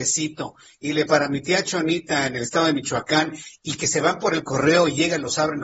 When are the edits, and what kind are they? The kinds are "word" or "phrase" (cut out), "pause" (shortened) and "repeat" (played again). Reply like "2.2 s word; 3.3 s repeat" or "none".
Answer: 1.1 s word